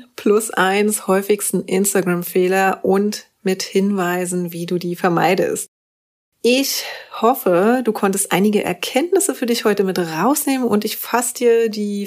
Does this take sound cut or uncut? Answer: uncut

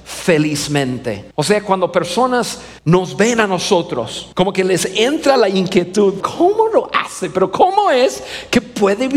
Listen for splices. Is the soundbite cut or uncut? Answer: cut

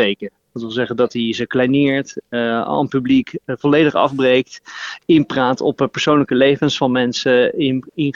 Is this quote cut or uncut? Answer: uncut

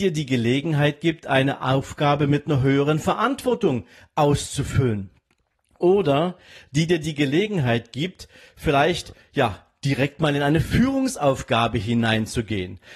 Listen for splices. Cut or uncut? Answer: uncut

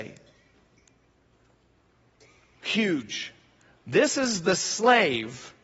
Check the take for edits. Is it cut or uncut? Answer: uncut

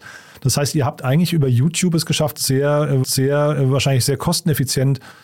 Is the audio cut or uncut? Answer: cut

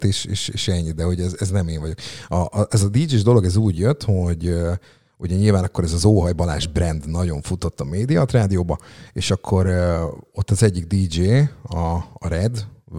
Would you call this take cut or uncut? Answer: uncut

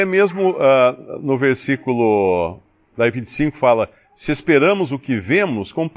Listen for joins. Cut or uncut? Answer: uncut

